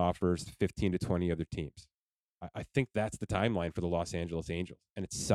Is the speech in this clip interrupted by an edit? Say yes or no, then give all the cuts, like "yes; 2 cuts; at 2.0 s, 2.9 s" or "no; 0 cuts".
no; 0 cuts